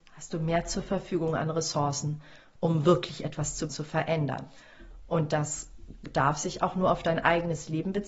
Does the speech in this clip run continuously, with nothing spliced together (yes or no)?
no